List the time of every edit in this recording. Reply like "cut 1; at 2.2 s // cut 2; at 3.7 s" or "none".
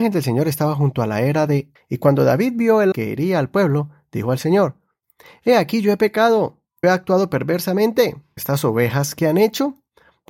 cut 1; at 1.8 s // cut 2; at 2.9 s // cut 3; at 6.8 s // cut 4; at 8.4 s